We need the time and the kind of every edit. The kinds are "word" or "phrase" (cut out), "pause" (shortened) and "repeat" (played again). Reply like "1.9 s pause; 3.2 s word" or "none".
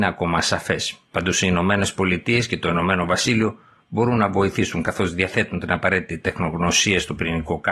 none